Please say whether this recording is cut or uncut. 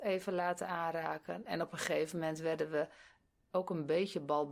uncut